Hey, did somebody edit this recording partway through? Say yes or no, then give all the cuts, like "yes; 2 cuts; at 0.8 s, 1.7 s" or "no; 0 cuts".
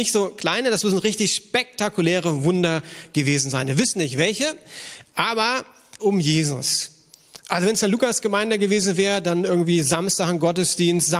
yes; 1 cut; at 6.0 s